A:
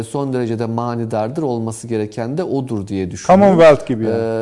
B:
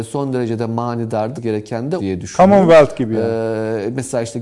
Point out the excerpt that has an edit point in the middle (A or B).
B